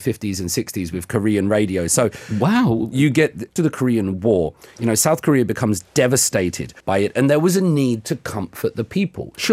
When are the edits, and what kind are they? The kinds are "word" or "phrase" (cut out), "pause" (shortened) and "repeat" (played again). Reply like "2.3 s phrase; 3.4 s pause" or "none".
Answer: 3.6 s word; 6.8 s pause